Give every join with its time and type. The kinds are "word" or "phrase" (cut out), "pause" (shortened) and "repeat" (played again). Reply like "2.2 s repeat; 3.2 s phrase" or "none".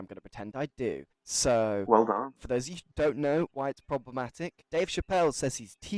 1.1 s pause; 4.7 s pause